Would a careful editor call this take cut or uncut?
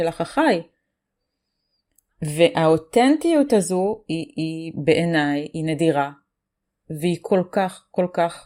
uncut